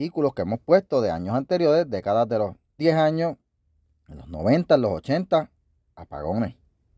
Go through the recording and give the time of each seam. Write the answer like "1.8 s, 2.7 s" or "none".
2.8 s